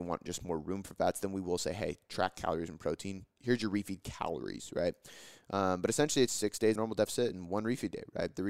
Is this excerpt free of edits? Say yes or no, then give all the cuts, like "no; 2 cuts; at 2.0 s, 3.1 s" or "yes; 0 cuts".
no; 3 cuts; at 3.4 s, 6.3 s, 6.7 s